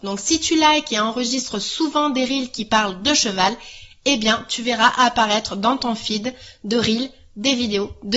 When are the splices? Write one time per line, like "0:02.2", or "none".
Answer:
none